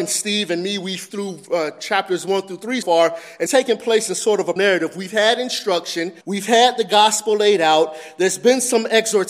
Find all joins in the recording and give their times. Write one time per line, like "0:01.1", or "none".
0:01.1
0:02.8
0:03.5
0:04.6
0:06.2